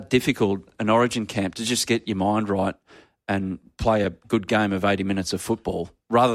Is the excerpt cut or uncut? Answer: uncut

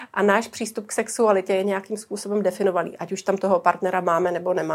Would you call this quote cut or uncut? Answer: uncut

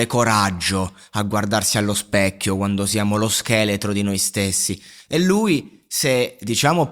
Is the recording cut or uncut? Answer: uncut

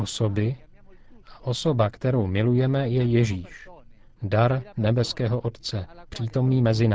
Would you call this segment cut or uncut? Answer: uncut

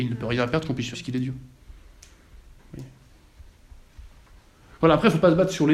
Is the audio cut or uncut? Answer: cut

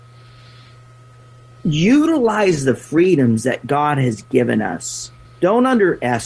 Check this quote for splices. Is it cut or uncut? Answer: cut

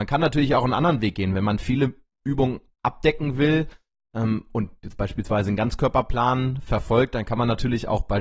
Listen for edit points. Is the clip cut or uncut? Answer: uncut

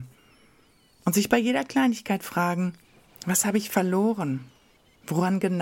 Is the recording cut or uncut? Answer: cut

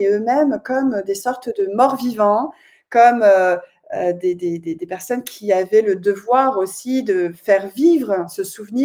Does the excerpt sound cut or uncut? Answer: uncut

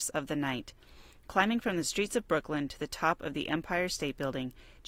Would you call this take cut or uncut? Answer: uncut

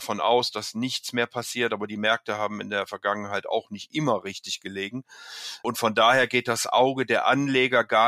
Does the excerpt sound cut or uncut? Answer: uncut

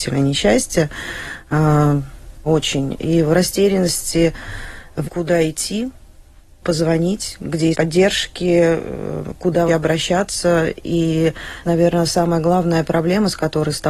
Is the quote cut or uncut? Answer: cut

